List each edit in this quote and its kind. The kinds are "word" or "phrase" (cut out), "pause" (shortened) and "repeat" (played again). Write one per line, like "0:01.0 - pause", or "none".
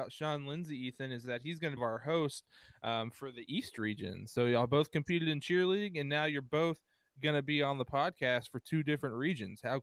0:01.8 - phrase